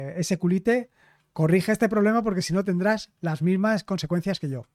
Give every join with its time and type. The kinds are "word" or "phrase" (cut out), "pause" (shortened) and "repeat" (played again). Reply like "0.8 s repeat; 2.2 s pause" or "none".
none